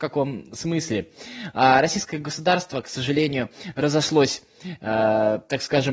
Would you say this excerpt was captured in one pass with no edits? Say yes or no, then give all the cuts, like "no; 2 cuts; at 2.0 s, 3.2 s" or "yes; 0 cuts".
yes; 0 cuts